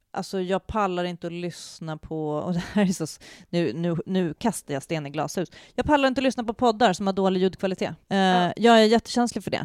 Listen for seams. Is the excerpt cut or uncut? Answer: cut